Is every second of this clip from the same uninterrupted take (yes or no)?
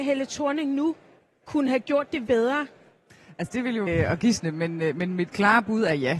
no